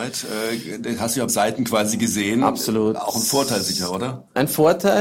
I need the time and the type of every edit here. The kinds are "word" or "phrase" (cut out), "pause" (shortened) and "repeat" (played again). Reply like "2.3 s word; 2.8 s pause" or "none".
1.3 s word